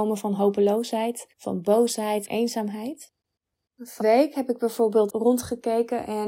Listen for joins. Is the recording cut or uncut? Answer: cut